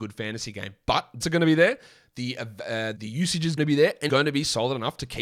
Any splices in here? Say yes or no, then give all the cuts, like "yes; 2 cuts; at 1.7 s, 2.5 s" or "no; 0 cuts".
yes; 4 cuts; at 1.2 s, 3.0 s, 3.6 s, 4.1 s